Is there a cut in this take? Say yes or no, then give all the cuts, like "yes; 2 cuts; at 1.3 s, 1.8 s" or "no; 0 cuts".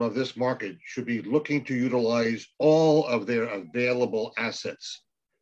yes; 1 cut; at 2.5 s